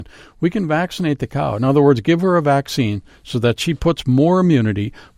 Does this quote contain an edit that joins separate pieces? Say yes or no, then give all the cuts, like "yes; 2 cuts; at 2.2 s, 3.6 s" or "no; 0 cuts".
no; 0 cuts